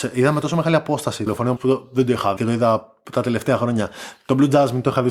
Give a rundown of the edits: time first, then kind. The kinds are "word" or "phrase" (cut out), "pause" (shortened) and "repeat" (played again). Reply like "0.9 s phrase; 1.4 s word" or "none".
1.3 s word; 1.6 s word; 2.4 s word